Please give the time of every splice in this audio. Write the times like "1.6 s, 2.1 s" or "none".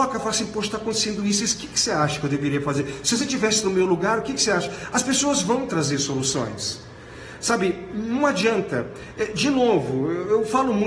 none